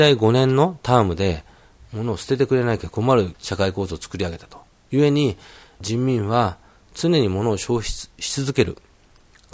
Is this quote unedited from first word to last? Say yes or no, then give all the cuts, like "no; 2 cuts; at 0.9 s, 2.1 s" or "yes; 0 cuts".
yes; 0 cuts